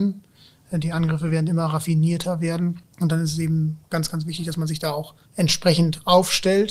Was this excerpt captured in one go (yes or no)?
no